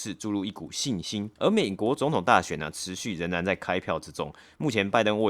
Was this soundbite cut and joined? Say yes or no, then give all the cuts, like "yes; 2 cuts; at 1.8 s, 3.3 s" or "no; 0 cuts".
yes; 1 cut; at 1.4 s